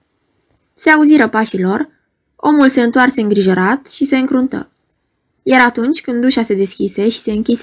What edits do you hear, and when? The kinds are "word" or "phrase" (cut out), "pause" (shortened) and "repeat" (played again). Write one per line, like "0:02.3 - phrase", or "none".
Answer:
none